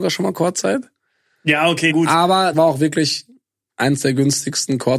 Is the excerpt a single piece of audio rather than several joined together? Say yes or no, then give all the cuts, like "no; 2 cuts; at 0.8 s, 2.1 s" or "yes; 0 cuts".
no; 2 cuts; at 1.9 s, 2.5 s